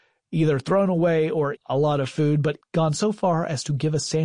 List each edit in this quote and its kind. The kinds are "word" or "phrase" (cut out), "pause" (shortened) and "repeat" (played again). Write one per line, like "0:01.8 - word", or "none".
0:01.6 - word
0:02.6 - word